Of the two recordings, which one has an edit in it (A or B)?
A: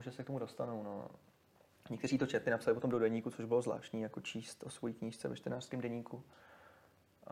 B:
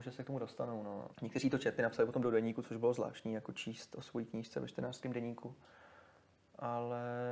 B